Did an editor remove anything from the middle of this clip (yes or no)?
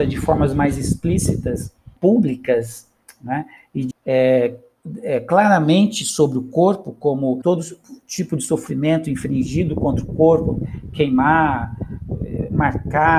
yes